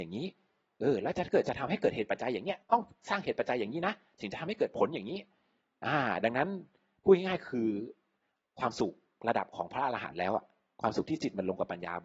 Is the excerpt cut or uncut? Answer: uncut